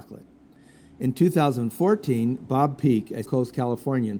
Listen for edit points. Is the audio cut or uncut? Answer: cut